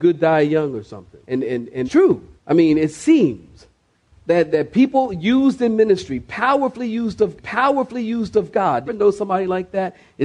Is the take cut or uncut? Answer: cut